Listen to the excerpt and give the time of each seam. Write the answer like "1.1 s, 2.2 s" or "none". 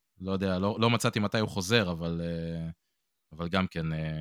none